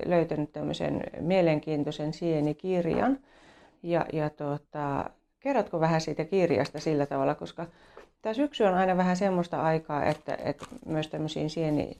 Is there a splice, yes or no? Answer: no